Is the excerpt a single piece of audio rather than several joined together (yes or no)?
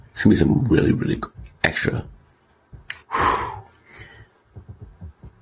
no